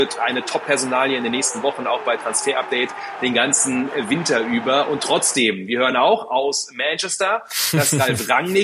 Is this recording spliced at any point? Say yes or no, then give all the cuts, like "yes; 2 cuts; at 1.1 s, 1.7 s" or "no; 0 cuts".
no; 0 cuts